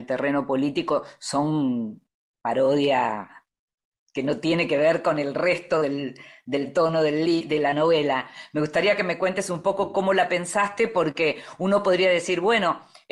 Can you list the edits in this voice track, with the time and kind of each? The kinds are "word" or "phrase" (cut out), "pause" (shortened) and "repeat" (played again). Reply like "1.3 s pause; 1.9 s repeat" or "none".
none